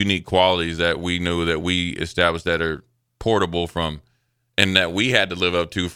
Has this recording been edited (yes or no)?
no